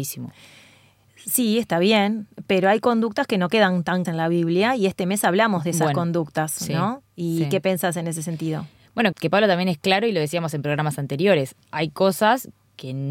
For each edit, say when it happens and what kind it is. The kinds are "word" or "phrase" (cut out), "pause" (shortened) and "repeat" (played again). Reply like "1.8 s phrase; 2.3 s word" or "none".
4.0 s word; 9.1 s word